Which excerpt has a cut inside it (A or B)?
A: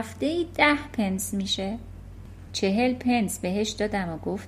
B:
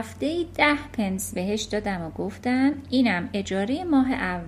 B